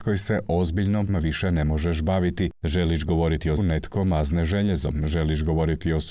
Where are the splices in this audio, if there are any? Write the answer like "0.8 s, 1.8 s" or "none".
1.1 s, 3.6 s